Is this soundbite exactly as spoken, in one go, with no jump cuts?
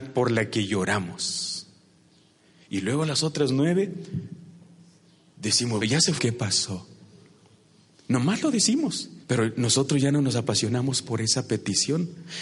no; 3 cuts; at 5.8 s, 6.2 s, 9.2 s

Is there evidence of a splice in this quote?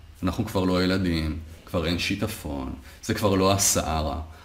no; 0 cuts

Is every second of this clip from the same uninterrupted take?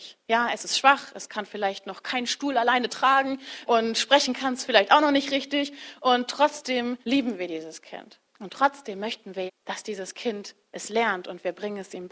no; 4 cuts; at 3.7 s, 7.0 s, 8.3 s, 9.5 s

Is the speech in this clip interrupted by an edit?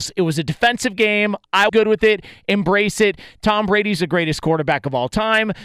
yes; 1 cut; at 1.7 s

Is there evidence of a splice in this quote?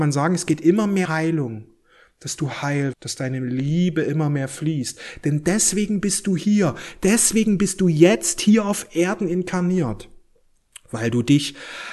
yes; 2 cuts; at 1.1 s, 2.9 s

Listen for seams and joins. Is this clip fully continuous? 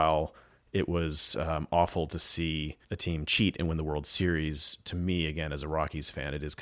no; 1 cut; at 2.8 s

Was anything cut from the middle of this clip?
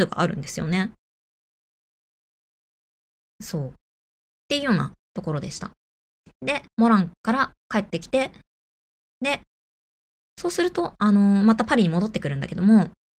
yes; 1 cut; at 6.7 s

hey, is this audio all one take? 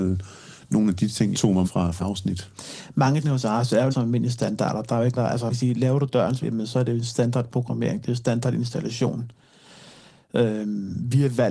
no; 8 cuts; at 1.3 s, 1.6 s, 2.0 s, 3.2 s, 3.9 s, 5.2 s, 5.5 s, 6.4 s

